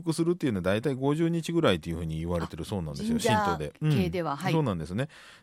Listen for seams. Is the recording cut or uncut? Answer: uncut